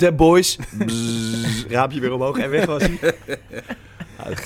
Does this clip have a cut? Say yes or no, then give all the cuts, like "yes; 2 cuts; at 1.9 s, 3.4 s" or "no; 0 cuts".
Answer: no; 0 cuts